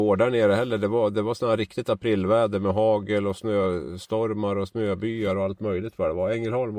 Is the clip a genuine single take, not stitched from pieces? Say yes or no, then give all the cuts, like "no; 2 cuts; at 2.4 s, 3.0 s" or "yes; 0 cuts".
yes; 0 cuts